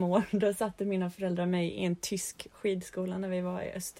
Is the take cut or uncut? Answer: uncut